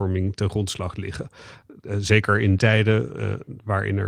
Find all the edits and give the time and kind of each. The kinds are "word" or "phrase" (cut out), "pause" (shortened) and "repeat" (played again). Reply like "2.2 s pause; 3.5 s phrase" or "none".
2.6 s word